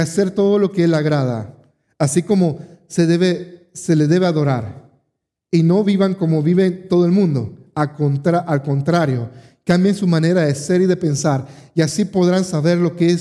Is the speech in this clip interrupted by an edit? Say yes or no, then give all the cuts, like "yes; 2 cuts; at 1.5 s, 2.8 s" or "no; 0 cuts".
no; 0 cuts